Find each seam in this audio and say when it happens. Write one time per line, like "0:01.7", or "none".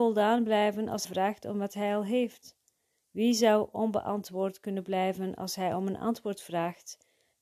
0:01.0

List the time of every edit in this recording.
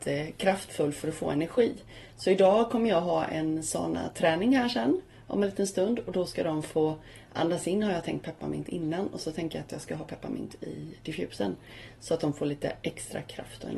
none

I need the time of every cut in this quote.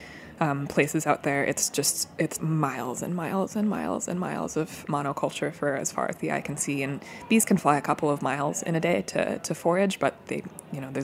0:02.4
0:04.9

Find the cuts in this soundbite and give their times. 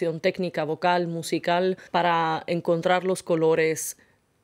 0:01.9

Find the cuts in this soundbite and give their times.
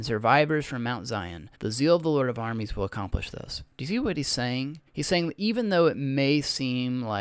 0:01.5
0:04.9

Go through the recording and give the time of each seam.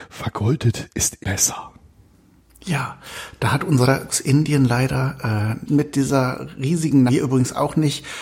0:01.2
0:04.1
0:05.7
0:07.1

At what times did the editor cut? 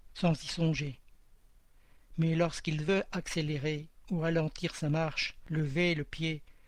none

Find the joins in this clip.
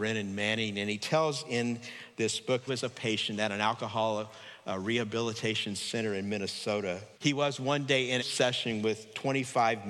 0:02.7
0:07.1
0:08.2

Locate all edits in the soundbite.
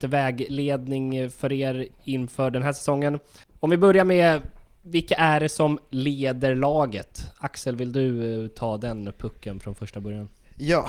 0:03.4

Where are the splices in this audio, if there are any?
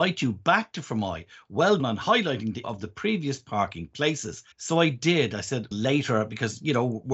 0:01.8
0:02.6
0:04.5
0:05.7

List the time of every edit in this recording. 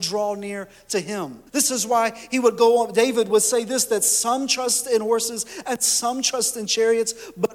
0:01.5

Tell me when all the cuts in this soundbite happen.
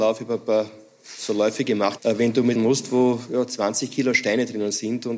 0:02.0
0:02.5

